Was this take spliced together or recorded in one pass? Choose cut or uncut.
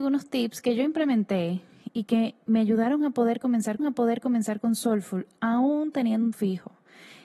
cut